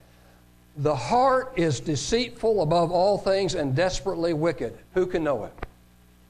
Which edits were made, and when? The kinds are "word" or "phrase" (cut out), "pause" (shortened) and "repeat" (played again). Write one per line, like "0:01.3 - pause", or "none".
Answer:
0:04.9 - pause